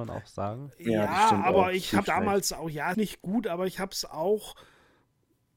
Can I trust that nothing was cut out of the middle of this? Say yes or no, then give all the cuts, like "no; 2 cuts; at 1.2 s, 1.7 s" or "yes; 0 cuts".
no; 2 cuts; at 2.1 s, 2.9 s